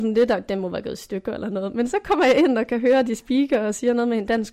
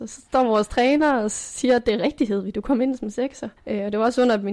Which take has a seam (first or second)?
second